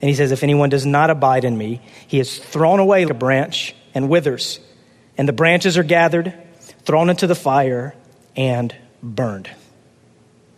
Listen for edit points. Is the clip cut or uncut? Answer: cut